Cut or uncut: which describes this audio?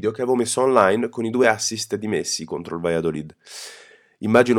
uncut